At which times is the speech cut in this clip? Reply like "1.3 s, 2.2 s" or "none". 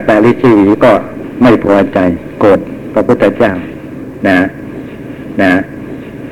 5.3 s